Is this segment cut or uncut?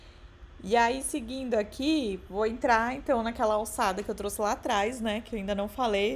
uncut